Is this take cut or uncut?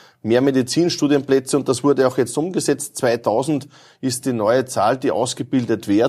uncut